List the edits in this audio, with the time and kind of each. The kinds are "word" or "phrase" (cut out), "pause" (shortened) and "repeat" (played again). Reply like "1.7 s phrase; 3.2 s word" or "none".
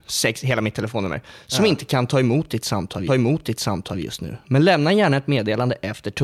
3.1 s repeat

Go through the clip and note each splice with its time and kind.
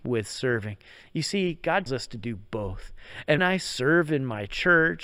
1.9 s word; 3.4 s word

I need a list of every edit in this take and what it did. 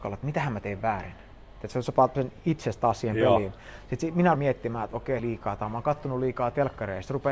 4.3 s word; 5.2 s phrase

